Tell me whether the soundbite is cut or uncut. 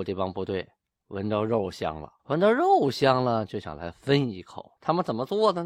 cut